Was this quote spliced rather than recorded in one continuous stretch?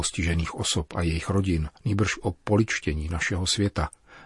yes; 1 cut; at 1.8 s

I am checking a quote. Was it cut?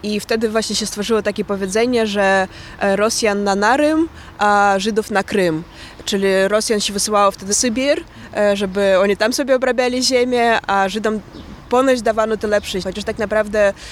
yes; 2 cuts; at 7.5 s, 12.8 s

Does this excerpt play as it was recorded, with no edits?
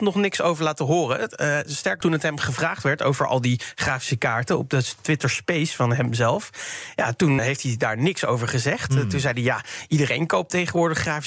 no; 2 cuts; at 2.0 s, 7.4 s

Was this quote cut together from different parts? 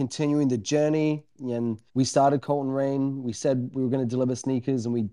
yes; 1 cut; at 1.9 s

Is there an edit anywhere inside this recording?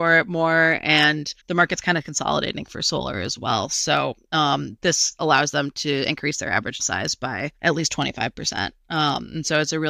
yes; 3 cuts; at 1.4 s, 6.8 s, 7.6 s

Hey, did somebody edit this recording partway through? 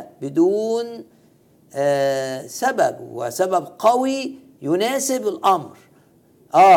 no; 0 cuts

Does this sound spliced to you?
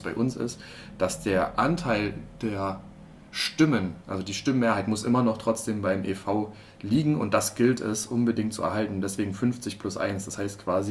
no; 0 cuts

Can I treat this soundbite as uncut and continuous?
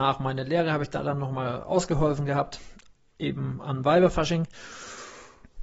yes; 0 cuts

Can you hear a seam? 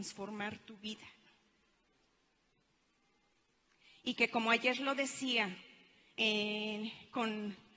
no; 0 cuts

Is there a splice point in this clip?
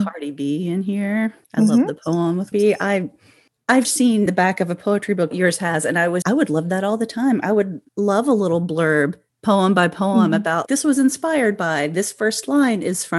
yes; 6 cuts; at 2.5 s, 3.8 s, 4.3 s, 5.3 s, 6.2 s, 10.7 s

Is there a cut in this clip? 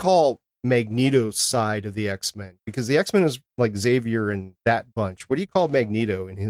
yes; 1 cut; at 4.6 s

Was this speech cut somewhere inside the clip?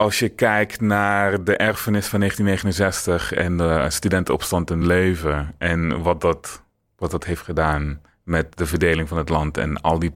no; 0 cuts

